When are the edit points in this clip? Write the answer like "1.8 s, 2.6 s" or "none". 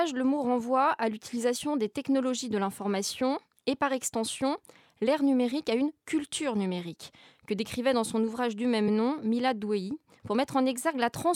none

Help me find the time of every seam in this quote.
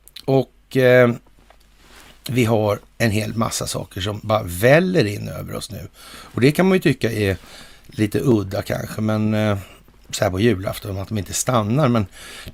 none

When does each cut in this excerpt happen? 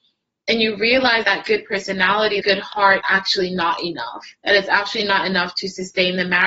1.2 s, 2.4 s, 3.0 s, 4.4 s

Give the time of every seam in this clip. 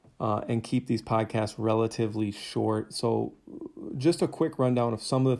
none

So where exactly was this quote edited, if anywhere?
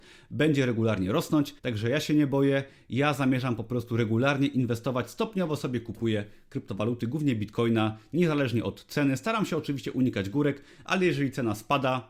1.6 s

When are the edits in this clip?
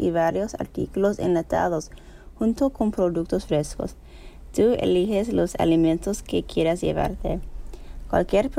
none

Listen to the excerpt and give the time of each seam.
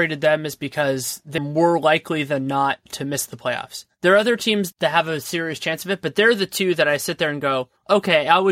1.4 s

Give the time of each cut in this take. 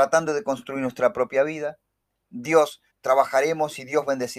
2.9 s

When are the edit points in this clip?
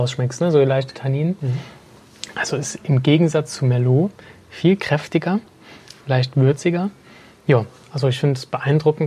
none

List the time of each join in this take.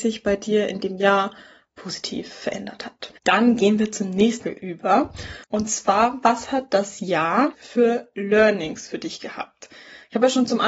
3.2 s, 4.4 s, 5.4 s, 7.5 s

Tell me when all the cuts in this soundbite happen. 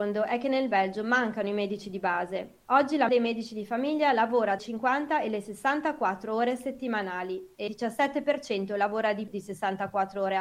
3.1 s, 4.6 s, 7.7 s, 9.3 s

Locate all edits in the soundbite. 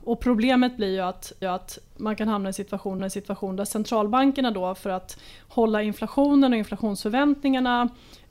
1.4 s, 3.0 s

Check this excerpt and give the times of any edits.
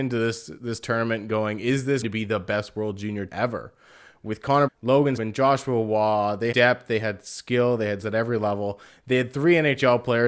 2.0 s, 3.3 s, 4.7 s, 5.2 s, 6.5 s, 8.0 s

